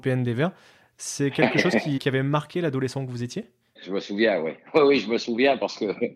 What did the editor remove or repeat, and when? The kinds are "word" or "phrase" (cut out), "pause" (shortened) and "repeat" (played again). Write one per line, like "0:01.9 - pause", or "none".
0:02.0 - word
0:03.8 - word